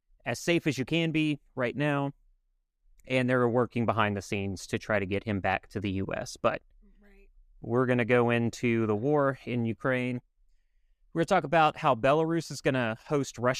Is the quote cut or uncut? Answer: uncut